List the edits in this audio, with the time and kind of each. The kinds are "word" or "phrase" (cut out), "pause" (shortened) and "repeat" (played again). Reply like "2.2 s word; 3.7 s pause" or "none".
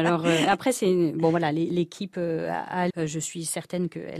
2.9 s word

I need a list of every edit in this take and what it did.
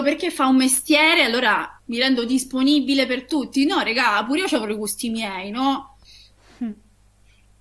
1.8 s pause

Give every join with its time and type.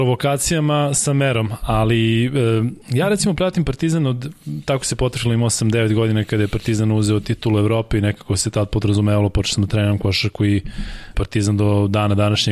2.8 s pause; 11.1 s word

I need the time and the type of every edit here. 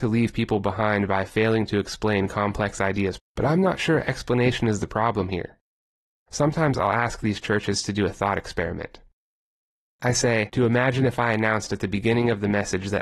3.2 s word

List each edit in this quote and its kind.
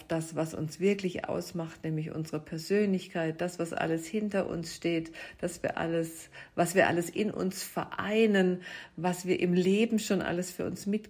none

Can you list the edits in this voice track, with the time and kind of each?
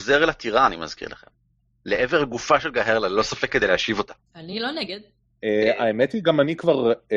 none

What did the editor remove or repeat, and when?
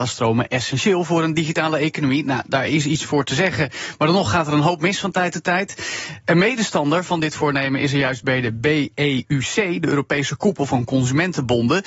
none

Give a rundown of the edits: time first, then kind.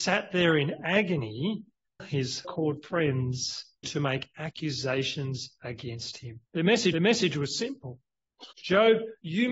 2.0 s word; 2.4 s word; 3.8 s word; 6.5 s pause; 6.9 s repeat; 8.5 s pause

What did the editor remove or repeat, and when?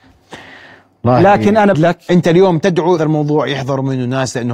1.7 s word; 3.0 s phrase

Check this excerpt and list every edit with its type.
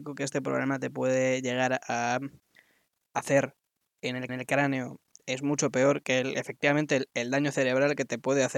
4.3 s repeat

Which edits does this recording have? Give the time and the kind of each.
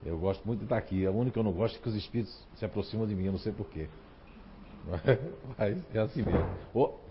1.3 s word

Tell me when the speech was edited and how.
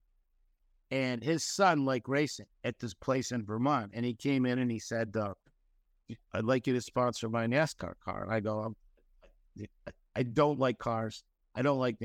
2.5 s pause

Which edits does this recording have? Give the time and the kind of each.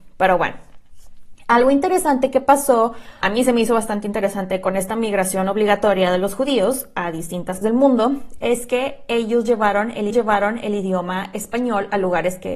3.2 s word; 7.6 s word; 10.1 s repeat

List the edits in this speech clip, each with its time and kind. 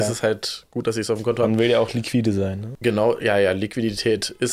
none

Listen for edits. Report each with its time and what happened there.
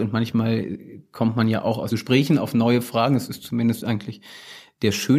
1.9 s word

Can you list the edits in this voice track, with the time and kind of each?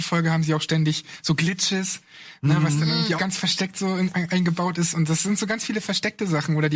3.2 s word

